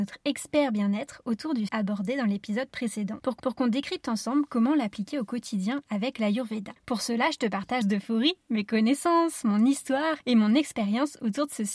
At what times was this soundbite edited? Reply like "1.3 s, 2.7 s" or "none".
1.7 s, 3.4 s, 7.8 s